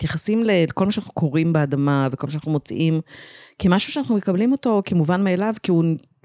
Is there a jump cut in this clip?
no; 0 cuts

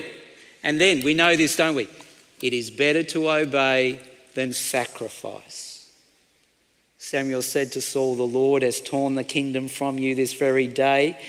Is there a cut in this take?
no; 0 cuts

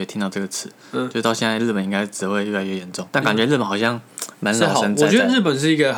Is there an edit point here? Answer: yes; 1 cut; at 3.1 s

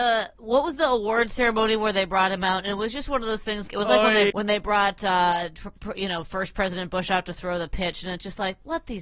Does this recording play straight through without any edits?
no; 2 cuts; at 3.7 s, 4.3 s

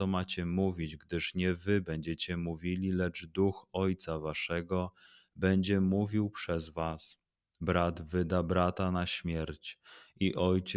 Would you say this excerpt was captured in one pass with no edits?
yes; 0 cuts

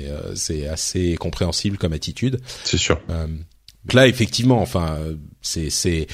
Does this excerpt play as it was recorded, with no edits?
no; 1 cut; at 3.9 s

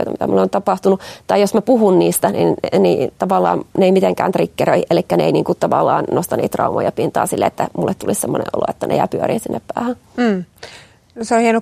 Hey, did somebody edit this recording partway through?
no; 0 cuts

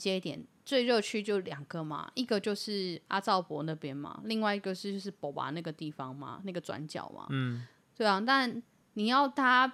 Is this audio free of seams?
yes; 0 cuts

